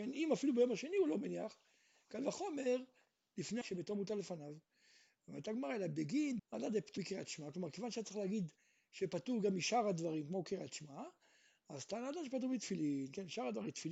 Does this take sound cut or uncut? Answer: cut